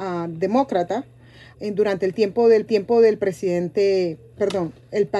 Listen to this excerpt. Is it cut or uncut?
cut